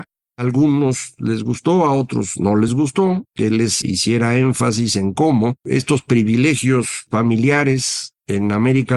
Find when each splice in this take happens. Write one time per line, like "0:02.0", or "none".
none